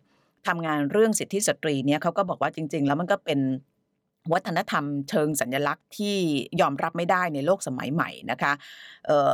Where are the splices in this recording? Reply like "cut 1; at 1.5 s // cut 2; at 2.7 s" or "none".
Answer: none